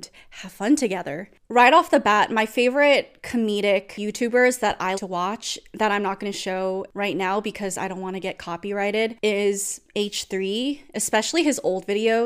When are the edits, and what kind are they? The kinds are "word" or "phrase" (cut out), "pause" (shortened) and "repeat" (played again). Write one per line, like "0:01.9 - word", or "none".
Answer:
0:04.9 - word